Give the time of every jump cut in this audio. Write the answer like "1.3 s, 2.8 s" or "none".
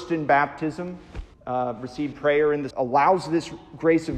1.3 s, 2.1 s, 2.7 s